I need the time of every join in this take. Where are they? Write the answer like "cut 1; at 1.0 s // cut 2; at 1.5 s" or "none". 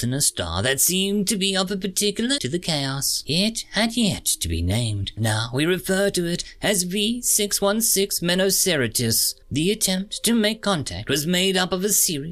cut 1; at 2.4 s // cut 2; at 5.2 s // cut 3; at 9.4 s